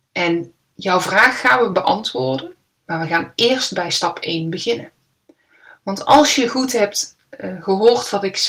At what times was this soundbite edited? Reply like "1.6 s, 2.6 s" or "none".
none